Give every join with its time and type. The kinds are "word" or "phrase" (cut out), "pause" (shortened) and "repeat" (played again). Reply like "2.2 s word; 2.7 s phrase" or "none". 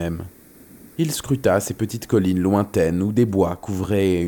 0.9 s pause